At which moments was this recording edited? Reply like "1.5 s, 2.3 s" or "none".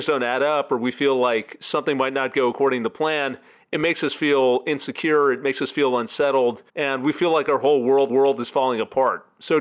6.7 s, 8.1 s